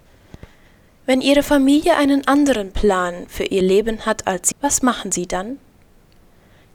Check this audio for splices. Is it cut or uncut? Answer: cut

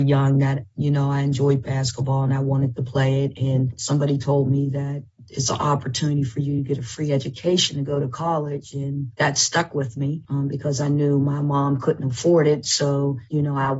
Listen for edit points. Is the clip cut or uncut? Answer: uncut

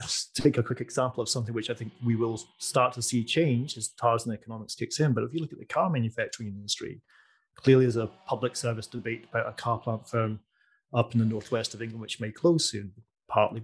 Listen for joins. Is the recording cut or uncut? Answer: uncut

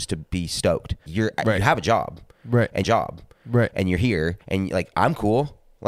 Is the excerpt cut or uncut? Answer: cut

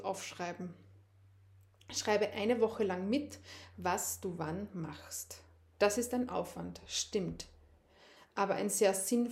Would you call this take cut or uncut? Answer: uncut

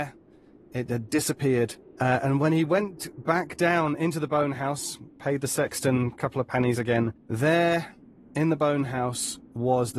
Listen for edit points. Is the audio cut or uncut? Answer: uncut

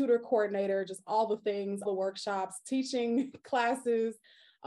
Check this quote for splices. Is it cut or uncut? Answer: cut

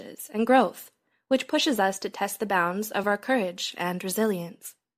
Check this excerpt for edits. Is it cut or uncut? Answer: uncut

